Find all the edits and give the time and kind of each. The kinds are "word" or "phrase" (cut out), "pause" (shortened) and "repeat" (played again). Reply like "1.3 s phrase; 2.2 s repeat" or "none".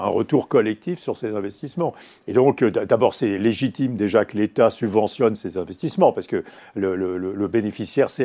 2.0 s pause